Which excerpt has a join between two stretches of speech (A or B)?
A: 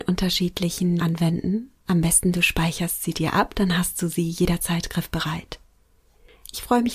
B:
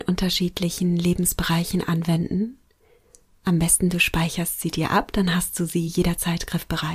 A